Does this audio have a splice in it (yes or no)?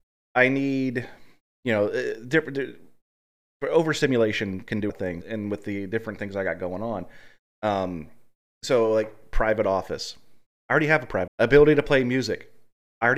yes